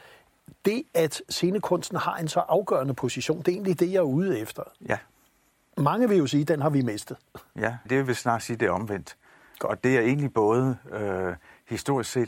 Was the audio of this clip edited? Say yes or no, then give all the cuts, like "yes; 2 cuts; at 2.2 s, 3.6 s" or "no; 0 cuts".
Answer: yes; 2 cuts; at 4.8 s, 7.9 s